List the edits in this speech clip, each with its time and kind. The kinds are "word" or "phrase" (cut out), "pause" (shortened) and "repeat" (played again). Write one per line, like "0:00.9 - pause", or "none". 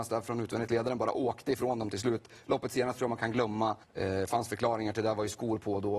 0:03.8 - pause